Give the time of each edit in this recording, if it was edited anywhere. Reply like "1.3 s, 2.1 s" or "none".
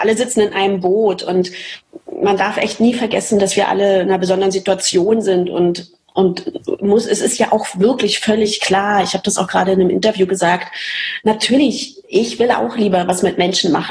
12.0 s